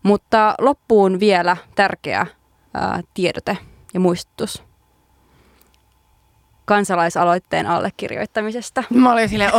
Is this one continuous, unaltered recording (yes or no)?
yes